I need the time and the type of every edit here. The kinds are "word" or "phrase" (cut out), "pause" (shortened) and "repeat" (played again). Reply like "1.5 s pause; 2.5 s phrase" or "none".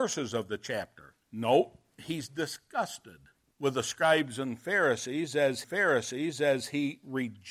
1.2 s pause; 3.4 s pause; 5.6 s repeat